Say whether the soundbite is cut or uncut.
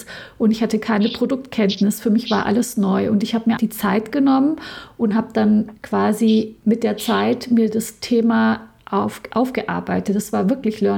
cut